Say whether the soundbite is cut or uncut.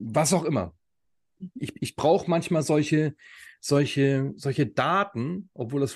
uncut